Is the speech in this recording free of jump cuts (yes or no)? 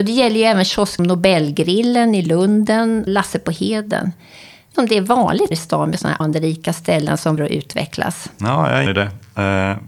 no